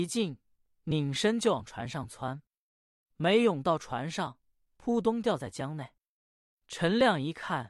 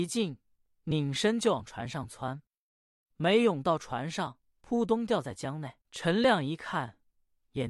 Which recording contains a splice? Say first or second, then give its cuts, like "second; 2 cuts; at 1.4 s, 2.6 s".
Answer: second; 2 cuts; at 4.5 s, 5.8 s